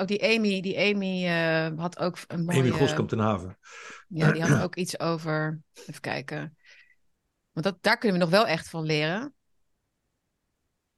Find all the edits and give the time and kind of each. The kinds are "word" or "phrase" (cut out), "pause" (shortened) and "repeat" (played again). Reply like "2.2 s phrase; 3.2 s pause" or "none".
none